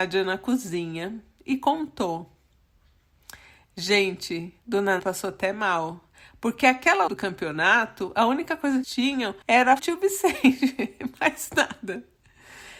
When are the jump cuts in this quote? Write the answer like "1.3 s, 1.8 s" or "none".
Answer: 5.0 s, 7.1 s, 8.8 s, 9.4 s, 9.8 s